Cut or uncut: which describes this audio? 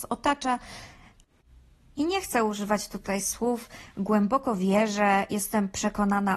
uncut